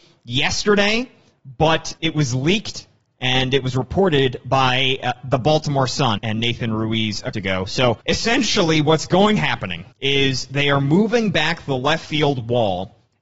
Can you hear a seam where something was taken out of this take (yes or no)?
yes